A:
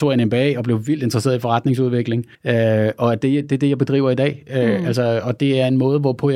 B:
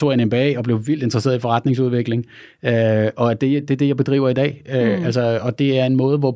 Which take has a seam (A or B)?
A